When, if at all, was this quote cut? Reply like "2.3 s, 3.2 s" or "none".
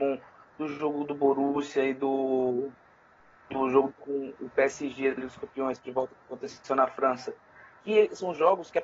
3.9 s, 5.2 s, 5.8 s, 7.8 s